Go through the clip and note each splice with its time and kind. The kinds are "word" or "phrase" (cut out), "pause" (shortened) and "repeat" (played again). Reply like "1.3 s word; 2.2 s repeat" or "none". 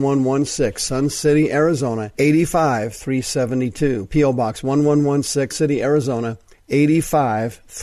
2.1 s pause; 5.5 s word; 6.5 s pause

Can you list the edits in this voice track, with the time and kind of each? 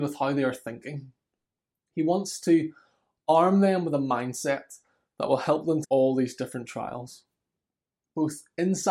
5.8 s word

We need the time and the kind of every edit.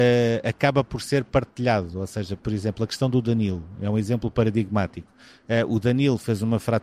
none

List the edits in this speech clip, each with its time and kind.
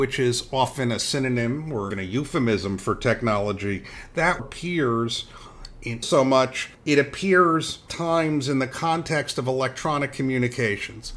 1.9 s word; 4.4 s phrase; 6.0 s phrase; 6.7 s pause; 7.9 s word

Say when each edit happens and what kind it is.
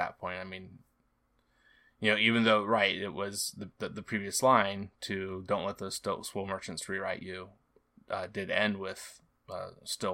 none

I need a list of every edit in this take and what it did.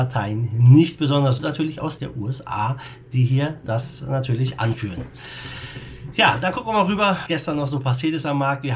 1.4 s word; 2.0 s word; 7.3 s word

